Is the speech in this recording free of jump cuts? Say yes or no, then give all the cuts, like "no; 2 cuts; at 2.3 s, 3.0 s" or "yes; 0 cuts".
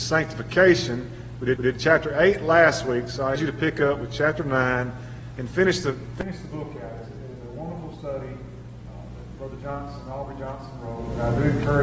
no; 2 cuts; at 1.6 s, 3.4 s